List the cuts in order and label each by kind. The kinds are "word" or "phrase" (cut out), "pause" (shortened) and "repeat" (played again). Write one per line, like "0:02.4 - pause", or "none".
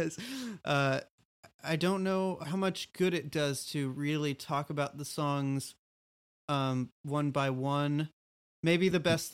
none

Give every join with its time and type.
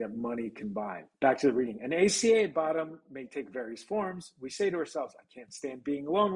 0:01.1 - pause

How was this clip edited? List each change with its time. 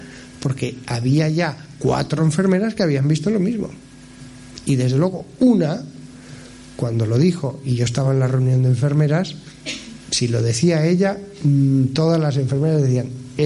none

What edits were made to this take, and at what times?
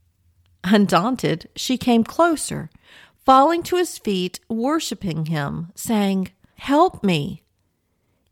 0:06.5 - word

